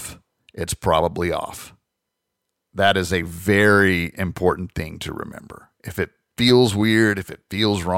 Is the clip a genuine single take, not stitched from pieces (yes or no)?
yes